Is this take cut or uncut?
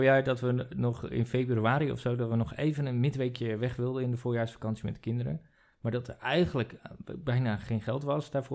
uncut